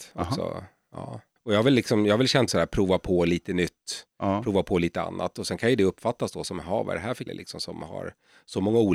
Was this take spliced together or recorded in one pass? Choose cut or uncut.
cut